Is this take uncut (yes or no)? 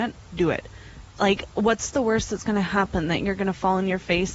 yes